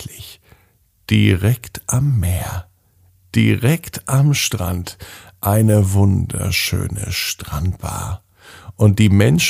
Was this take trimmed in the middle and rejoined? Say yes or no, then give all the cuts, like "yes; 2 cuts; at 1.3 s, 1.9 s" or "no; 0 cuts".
no; 0 cuts